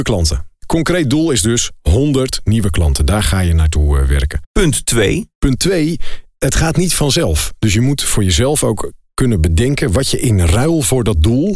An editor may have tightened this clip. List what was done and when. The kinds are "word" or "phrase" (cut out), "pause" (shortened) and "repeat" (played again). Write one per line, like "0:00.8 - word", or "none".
none